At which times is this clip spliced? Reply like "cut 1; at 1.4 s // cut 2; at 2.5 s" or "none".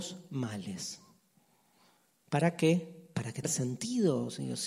cut 1; at 3.4 s